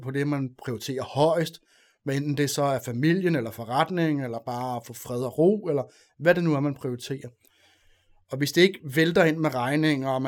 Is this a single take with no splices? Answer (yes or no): yes